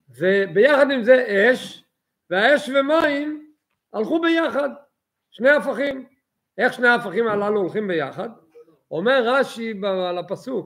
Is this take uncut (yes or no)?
yes